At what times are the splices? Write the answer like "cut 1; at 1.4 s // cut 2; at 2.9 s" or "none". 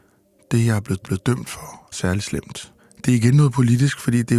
cut 1; at 1.0 s // cut 2; at 1.9 s // cut 3; at 2.8 s